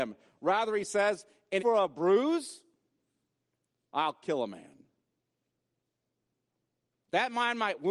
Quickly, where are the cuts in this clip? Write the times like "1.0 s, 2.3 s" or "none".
1.6 s